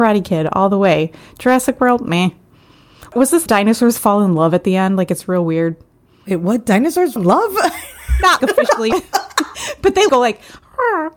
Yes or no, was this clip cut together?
yes